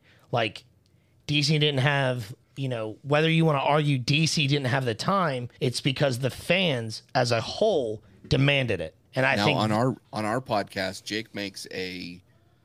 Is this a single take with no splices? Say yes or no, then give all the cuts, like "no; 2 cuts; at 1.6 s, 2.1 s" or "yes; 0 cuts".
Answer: no; 4 cuts; at 2.4 s, 5.6 s, 9.1 s, 10.0 s